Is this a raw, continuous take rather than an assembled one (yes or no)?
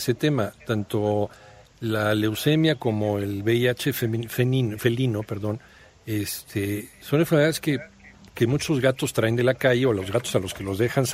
yes